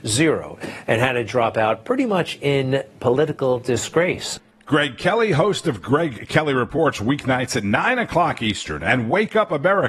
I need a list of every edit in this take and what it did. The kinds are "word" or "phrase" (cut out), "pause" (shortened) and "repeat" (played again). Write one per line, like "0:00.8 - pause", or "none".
none